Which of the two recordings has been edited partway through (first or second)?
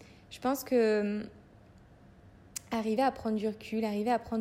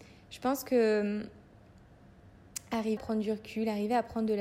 second